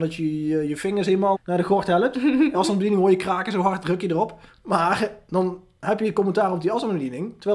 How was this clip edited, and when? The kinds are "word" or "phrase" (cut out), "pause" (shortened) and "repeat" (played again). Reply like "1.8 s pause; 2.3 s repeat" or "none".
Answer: 1.3 s word; 2.5 s word; 4.5 s pause